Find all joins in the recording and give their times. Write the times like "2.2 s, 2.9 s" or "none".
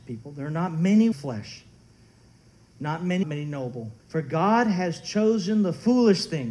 1.1 s, 3.2 s, 4.0 s